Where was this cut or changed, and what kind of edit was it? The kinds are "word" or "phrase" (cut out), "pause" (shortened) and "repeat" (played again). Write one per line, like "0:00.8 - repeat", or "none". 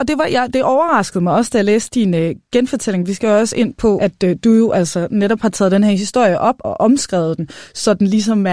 0:06.6 - word

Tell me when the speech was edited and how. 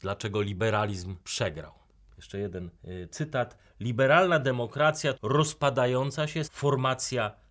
0:01.2 - pause
0:02.8 - pause
0:05.1 - phrase
0:06.4 - word

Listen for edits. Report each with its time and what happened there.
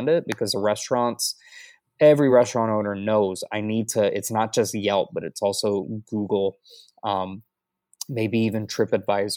none

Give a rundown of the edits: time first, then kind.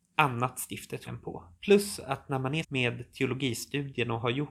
0:01.1 - word
0:01.6 - pause
0:02.6 - word

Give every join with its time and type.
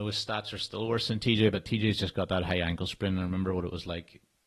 none

